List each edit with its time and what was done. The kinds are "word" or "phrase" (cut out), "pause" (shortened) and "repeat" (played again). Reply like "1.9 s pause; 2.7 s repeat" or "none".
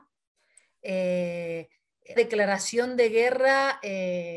2.2 s word

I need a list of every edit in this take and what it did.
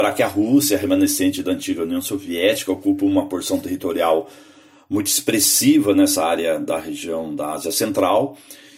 none

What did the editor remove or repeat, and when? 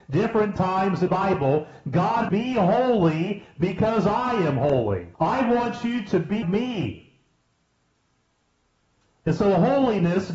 1.1 s word; 2.3 s phrase; 5.1 s pause; 6.4 s word

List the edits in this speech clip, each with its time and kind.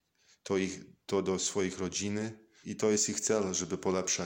2.6 s word

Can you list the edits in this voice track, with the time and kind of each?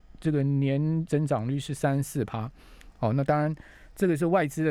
1.1 s word

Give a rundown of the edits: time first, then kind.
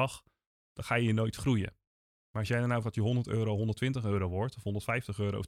2.8 s word

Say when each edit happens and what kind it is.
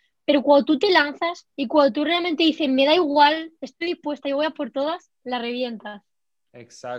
1.5 s pause

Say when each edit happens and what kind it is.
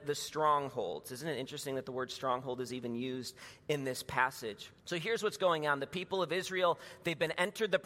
4.8 s pause

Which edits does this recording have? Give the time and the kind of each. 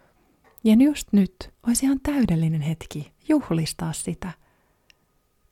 1.6 s pause; 3.2 s pause

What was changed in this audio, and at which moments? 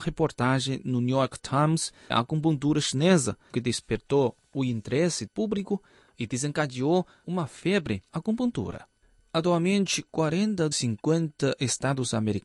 2.1 s word; 3.5 s word; 5.3 s word; 7.2 s word; 8.1 s word; 10.7 s word

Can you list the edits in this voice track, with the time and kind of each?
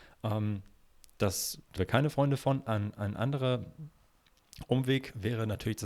1.8 s word

